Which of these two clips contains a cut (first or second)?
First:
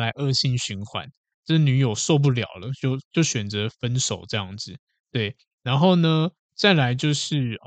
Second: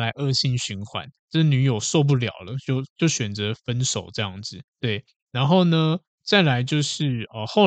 second